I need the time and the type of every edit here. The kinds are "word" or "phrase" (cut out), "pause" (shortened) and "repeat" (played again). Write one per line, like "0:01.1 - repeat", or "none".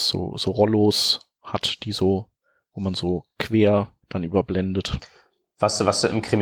0:04.0 - pause